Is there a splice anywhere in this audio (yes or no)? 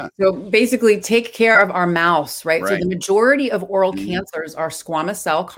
no